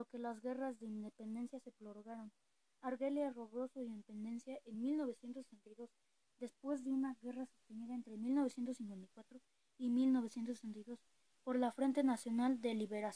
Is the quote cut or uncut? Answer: uncut